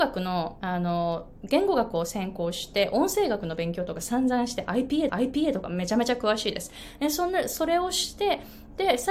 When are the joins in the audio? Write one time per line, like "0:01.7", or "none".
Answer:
0:05.1